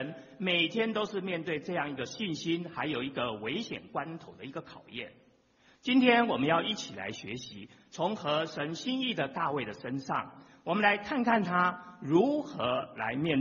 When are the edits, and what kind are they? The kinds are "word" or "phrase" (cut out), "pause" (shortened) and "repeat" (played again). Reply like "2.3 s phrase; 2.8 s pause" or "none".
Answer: none